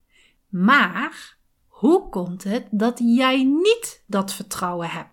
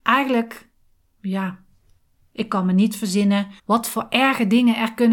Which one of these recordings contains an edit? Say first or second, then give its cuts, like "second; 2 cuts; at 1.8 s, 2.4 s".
second; 1 cut; at 3.6 s